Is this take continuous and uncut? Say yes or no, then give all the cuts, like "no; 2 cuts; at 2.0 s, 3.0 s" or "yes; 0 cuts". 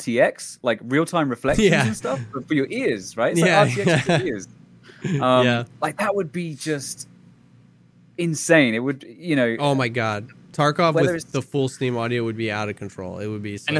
yes; 0 cuts